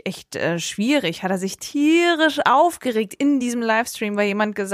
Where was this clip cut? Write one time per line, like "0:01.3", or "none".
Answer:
none